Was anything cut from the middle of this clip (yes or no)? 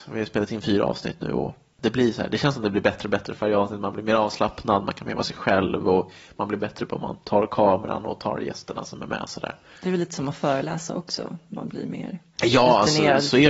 no